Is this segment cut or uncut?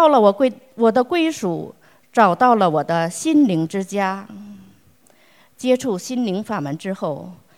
uncut